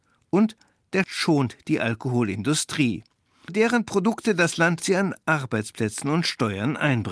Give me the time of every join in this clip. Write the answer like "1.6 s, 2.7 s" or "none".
1.0 s, 3.5 s, 4.8 s